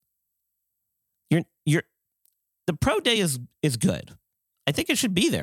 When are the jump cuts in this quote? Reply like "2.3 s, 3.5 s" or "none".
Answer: none

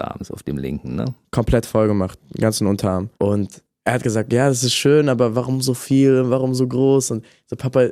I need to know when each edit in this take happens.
3.1 s

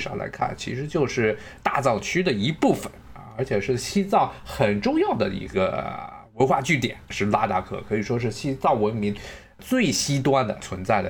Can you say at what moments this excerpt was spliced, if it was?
7.0 s

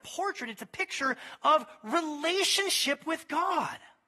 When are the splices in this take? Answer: none

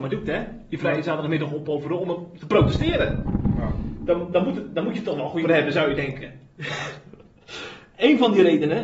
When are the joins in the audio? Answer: 5.4 s

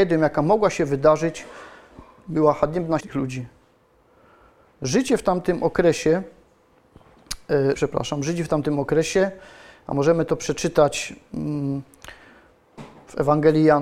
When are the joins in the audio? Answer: 3.0 s, 7.7 s

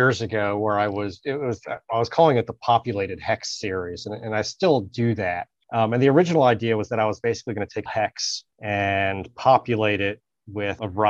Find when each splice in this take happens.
7.9 s

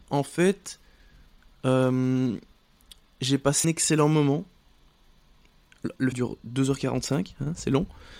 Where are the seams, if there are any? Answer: 3.6 s, 6.1 s

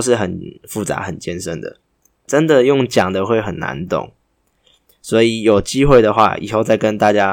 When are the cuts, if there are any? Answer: none

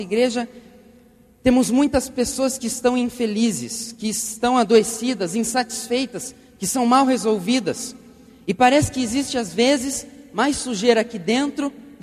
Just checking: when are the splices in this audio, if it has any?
none

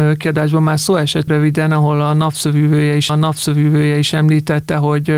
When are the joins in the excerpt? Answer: 1.3 s, 3.1 s

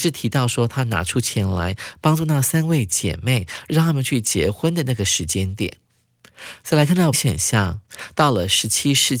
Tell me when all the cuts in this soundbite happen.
7.1 s

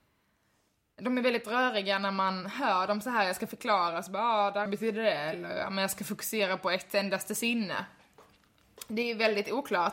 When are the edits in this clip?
4.7 s

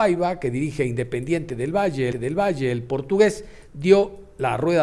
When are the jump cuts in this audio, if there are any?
2.1 s

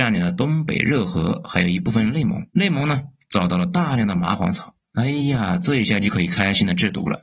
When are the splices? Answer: 2.5 s

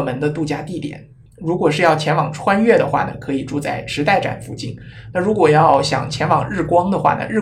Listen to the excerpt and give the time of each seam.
none

